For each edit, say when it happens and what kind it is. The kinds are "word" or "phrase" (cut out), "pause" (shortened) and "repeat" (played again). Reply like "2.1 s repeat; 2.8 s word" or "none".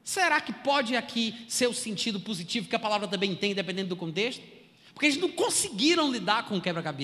none